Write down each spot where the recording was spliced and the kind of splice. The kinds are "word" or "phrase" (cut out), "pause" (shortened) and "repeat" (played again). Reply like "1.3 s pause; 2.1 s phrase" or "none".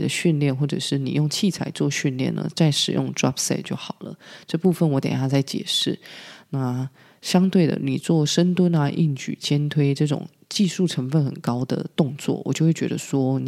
none

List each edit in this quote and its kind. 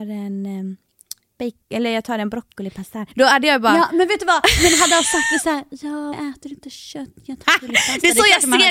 3.1 s pause; 6.1 s word; 7.4 s word

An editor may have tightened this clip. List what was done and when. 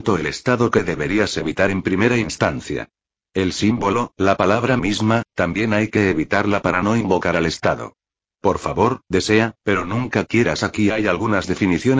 none

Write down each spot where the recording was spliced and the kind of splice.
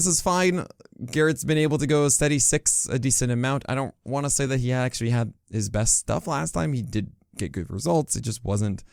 none

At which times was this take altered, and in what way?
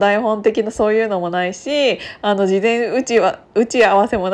3.4 s pause

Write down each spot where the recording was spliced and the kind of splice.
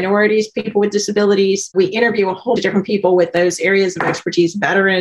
2.6 s word

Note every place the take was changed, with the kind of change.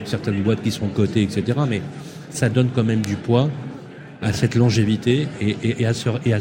none

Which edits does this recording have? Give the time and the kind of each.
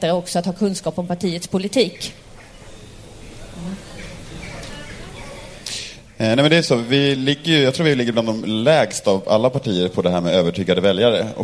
none

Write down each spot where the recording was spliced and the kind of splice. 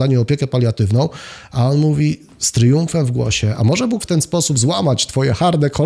4.0 s word

